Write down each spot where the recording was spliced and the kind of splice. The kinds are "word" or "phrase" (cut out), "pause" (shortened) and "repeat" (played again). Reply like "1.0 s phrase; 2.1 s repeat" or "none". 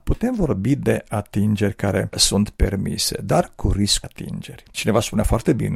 1.1 s word; 4.0 s word